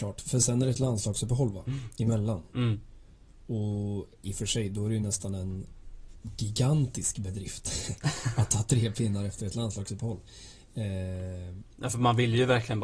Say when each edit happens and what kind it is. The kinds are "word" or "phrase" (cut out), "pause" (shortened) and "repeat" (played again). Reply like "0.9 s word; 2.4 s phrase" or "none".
none